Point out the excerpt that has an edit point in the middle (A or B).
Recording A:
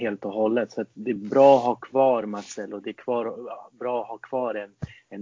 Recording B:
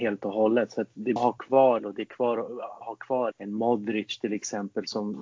B